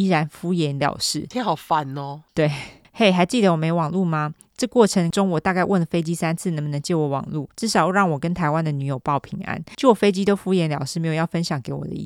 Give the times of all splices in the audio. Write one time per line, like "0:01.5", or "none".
none